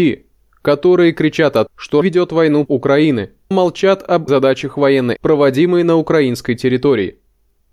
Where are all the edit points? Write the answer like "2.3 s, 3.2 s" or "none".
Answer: 1.7 s, 2.0 s, 2.7 s, 3.5 s, 4.3 s, 5.2 s